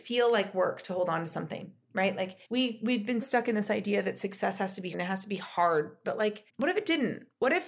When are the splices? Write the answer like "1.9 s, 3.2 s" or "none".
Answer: 2.4 s, 3.2 s, 4.9 s, 6.5 s